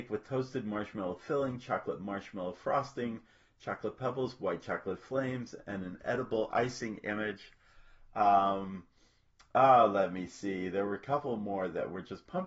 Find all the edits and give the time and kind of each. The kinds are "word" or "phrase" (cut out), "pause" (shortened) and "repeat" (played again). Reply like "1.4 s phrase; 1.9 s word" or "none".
none